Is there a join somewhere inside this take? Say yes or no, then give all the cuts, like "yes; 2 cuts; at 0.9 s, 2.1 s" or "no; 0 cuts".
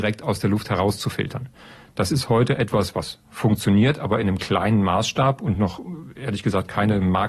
no; 0 cuts